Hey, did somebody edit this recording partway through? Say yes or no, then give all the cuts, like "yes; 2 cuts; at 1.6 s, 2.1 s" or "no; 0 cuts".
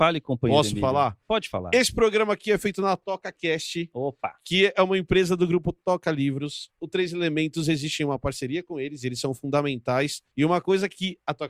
yes; 1 cut; at 10.3 s